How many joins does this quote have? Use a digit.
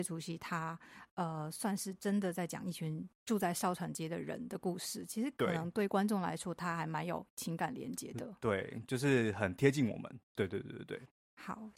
1